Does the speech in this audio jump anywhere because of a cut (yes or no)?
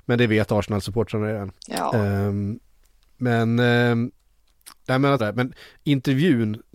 yes